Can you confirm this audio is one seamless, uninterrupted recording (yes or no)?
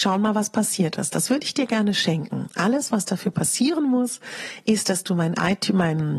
yes